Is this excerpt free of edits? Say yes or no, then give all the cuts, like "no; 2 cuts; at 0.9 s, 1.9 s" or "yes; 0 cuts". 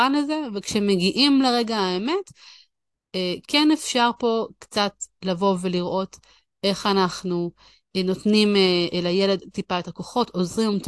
yes; 0 cuts